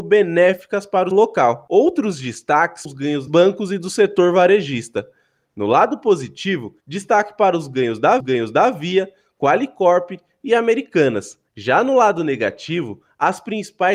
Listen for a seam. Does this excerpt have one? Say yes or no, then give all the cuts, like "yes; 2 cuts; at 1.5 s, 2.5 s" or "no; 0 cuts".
yes; 6 cuts; at 1.1 s, 2.9 s, 3.3 s, 6.8 s, 8.2 s, 11.5 s